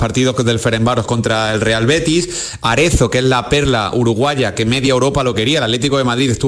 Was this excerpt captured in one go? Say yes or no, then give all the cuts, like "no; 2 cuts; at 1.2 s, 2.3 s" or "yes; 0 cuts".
yes; 0 cuts